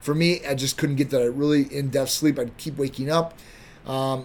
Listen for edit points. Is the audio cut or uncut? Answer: cut